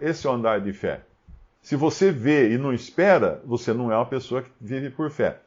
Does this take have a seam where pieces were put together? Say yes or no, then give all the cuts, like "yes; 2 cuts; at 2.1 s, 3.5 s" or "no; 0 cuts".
no; 0 cuts